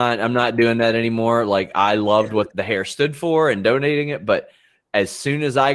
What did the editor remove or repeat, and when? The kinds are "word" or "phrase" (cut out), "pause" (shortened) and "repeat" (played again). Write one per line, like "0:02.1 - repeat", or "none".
0:02.5 - word